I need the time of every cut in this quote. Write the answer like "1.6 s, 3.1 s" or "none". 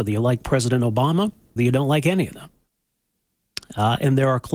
1.6 s